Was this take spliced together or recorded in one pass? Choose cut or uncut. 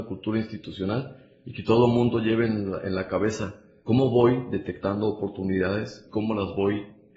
cut